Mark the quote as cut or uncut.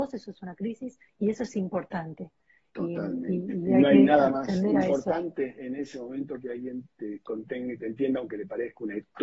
uncut